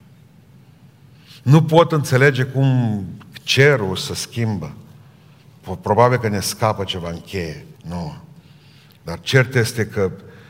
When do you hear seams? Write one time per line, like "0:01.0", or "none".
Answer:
0:07.8